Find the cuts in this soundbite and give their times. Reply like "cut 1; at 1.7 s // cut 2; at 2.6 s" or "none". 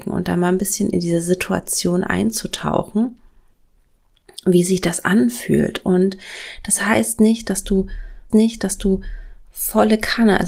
cut 1; at 8.3 s